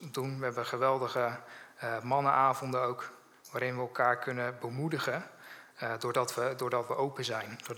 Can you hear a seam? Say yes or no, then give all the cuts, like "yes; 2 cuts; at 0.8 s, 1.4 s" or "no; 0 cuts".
no; 0 cuts